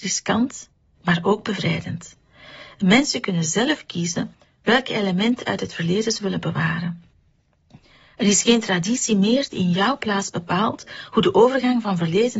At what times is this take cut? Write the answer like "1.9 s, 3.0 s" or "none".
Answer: none